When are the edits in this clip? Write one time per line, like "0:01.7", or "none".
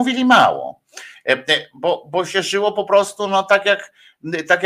none